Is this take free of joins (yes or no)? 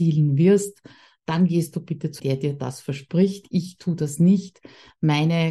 no